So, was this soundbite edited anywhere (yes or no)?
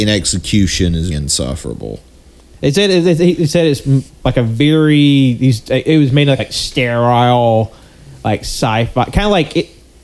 yes